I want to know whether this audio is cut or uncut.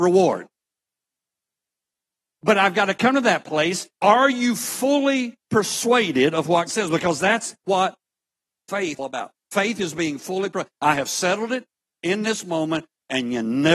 cut